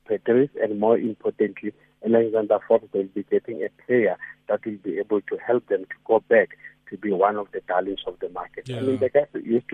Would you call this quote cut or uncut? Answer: uncut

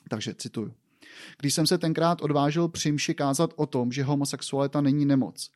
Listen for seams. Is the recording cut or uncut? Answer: uncut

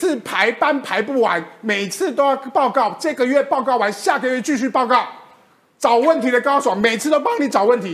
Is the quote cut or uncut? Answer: uncut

